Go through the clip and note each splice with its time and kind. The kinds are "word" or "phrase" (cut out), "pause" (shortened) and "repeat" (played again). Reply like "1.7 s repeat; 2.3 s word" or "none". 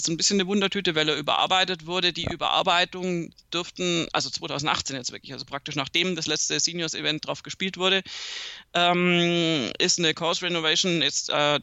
none